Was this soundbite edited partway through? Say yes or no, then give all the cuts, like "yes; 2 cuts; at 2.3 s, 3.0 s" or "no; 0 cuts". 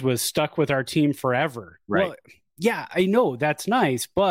yes; 1 cut; at 2.9 s